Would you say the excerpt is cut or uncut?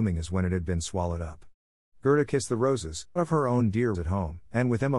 cut